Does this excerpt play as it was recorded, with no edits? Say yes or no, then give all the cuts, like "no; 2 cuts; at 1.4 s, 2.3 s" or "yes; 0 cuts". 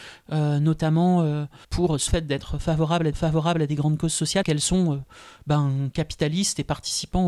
no; 4 cuts; at 1.6 s, 2.1 s, 3.1 s, 4.4 s